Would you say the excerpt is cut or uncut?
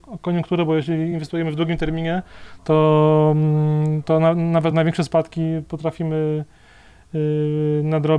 uncut